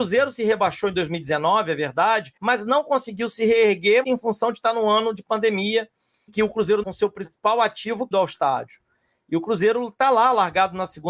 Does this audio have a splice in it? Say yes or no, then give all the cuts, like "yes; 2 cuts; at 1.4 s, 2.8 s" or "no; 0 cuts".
yes; 5 cuts; at 2.4 s, 4.0 s, 6.3 s, 6.8 s, 8.1 s